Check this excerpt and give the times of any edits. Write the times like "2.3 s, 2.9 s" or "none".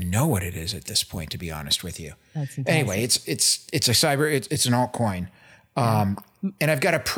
4.5 s

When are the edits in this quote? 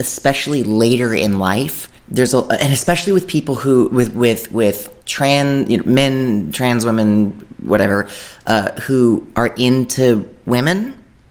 2.0 s, 5.0 s

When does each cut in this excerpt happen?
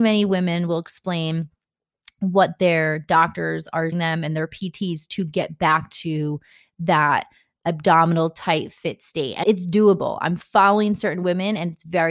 3.9 s, 9.4 s

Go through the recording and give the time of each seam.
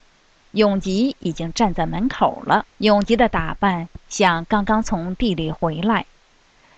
2.7 s

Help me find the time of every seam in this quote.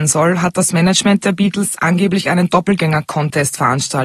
none

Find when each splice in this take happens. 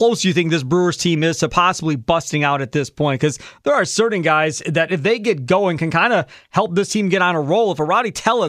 none

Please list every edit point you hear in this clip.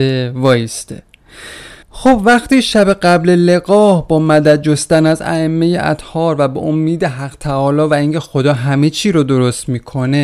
1.8 s

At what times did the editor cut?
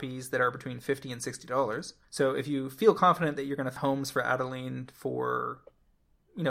2.0 s, 3.8 s

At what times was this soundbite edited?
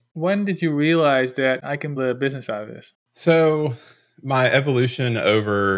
1.6 s, 2.0 s

